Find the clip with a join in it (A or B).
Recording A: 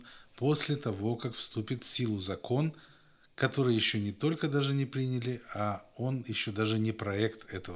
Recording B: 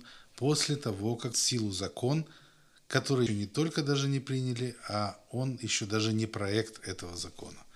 B